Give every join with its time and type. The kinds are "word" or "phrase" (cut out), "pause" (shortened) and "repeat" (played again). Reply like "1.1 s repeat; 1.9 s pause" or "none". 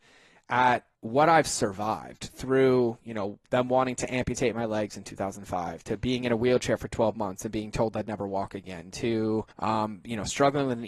0.9 s pause; 9.5 s pause

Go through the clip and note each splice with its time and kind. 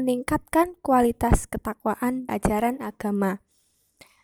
2.3 s word

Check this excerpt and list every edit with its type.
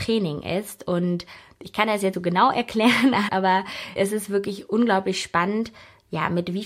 2.1 s word; 3.3 s word; 4.0 s word

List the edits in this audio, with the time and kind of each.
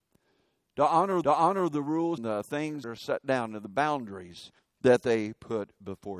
1.2 s repeat; 2.2 s phrase; 2.8 s word; 4.6 s pause

